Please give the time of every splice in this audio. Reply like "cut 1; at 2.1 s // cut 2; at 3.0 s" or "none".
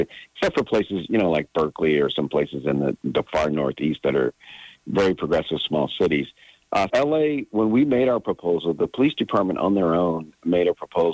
cut 1; at 6.9 s